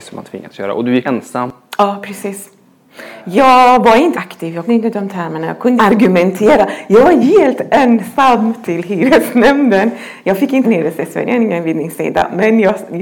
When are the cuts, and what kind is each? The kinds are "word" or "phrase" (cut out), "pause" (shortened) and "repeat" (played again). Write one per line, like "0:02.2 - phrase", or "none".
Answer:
0:01.0 - word
0:04.1 - word
0:04.7 - word
0:05.8 - word
0:07.2 - word
0:10.6 - phrase